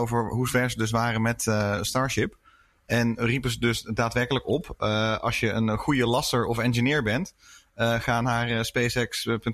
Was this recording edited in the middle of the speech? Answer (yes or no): no